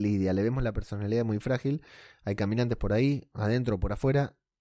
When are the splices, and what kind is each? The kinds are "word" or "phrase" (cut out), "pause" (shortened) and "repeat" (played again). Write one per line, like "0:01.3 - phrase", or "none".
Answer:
none